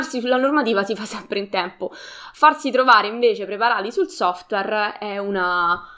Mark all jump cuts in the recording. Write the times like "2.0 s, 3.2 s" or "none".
none